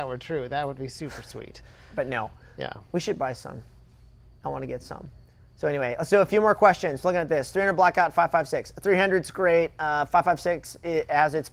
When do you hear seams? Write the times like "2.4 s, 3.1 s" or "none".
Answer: none